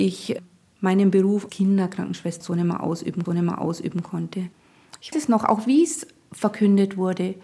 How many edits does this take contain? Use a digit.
4